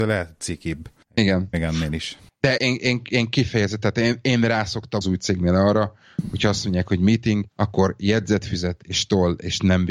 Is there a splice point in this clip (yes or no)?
yes